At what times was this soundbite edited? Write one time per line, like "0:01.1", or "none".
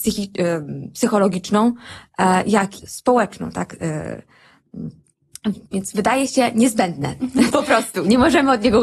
0:02.8
0:05.7